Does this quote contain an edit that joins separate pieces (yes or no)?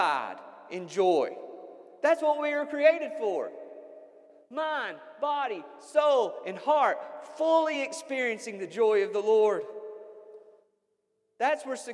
no